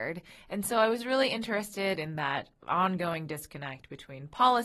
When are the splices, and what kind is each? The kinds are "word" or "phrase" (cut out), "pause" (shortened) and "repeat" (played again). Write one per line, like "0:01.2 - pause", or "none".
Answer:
none